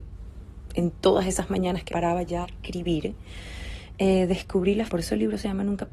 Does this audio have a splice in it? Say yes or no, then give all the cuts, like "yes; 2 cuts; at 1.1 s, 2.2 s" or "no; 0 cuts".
yes; 3 cuts; at 1.9 s, 2.4 s, 4.9 s